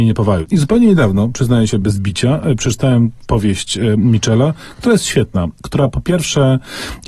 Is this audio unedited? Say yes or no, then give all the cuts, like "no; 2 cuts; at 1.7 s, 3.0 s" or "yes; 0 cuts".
yes; 0 cuts